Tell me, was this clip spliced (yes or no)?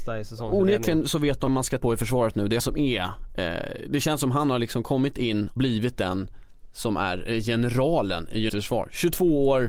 yes